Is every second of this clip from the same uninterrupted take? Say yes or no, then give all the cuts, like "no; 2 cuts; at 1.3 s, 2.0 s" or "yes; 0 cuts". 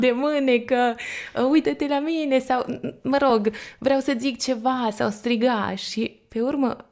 yes; 0 cuts